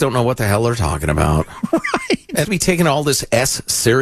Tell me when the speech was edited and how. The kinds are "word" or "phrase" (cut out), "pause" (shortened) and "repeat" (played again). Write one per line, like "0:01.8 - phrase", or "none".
0:02.4 - phrase